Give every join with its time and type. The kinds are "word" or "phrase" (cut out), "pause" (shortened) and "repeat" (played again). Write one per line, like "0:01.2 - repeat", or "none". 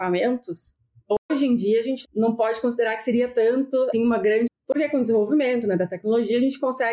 0:02.0 - word
0:03.9 - word
0:04.5 - word

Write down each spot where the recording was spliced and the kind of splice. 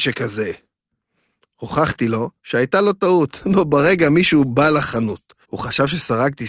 0:02.4 - pause
0:05.4 - pause

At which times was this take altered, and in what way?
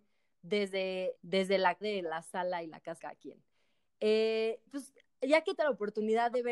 0:01.2 - word
0:01.8 - word
0:03.0 - word
0:04.7 - word
0:05.6 - word

